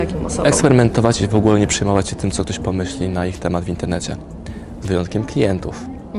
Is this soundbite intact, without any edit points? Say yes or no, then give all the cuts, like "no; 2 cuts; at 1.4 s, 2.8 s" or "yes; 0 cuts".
yes; 0 cuts